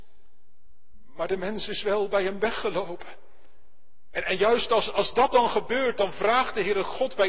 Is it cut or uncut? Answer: uncut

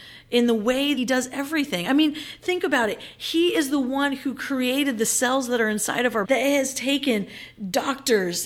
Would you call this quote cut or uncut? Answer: cut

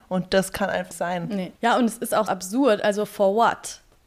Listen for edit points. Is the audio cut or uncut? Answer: cut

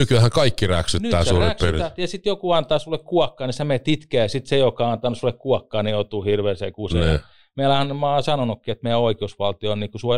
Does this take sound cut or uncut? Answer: uncut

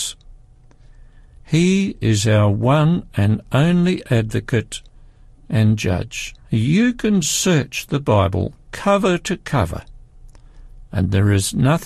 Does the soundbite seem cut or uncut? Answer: cut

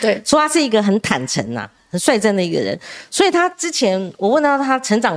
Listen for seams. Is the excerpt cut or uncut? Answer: uncut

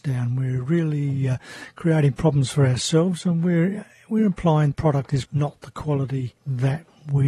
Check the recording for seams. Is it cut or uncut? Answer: cut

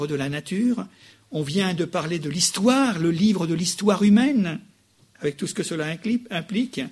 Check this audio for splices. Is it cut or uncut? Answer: uncut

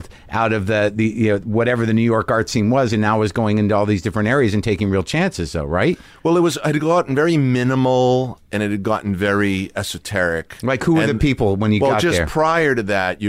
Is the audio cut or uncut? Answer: uncut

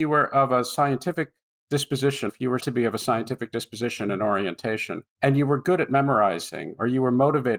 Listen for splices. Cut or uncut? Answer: cut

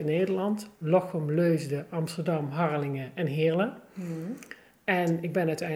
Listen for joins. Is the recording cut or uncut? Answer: uncut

